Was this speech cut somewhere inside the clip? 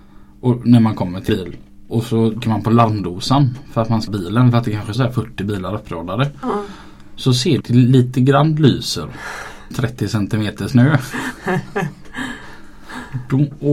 yes; 7 cuts; at 1.3 s, 1.9 s, 2.4 s, 4.1 s, 5.0 s, 7.6 s, 9.7 s

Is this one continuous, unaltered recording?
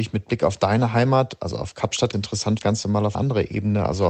no; 3 cuts; at 2.1 s, 2.6 s, 3.1 s

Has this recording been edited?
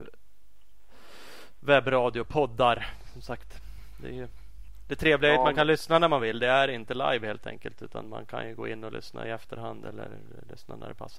no; 0 cuts

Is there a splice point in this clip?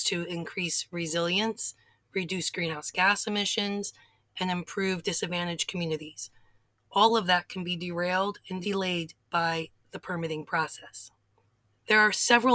no; 0 cuts

